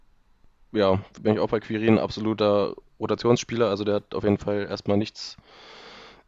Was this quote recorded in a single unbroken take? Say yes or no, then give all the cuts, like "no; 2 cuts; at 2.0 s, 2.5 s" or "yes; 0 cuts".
no; 1 cut; at 1.2 s